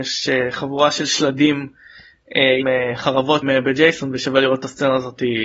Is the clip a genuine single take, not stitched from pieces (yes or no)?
no